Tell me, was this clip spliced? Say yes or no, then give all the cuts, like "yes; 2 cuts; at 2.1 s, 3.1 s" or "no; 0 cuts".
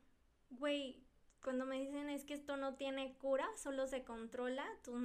no; 0 cuts